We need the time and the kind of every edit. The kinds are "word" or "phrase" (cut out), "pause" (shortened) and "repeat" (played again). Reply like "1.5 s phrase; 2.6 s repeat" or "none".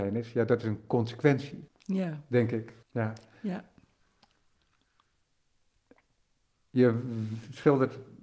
1.7 s pause; 2.8 s pause